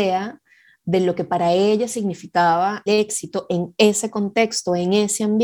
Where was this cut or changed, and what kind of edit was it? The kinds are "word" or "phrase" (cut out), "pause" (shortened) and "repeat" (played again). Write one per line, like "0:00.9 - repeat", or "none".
0:02.9 - word